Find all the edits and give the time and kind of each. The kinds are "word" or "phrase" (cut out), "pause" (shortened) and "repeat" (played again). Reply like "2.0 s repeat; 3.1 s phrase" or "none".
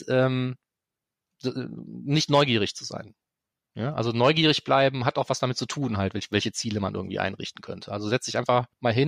none